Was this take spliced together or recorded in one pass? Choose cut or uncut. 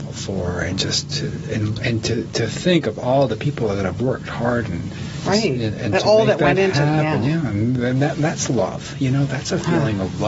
uncut